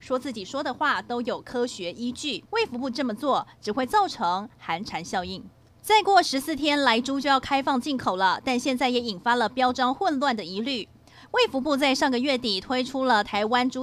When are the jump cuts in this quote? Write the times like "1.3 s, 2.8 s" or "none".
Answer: 2.5 s, 5.7 s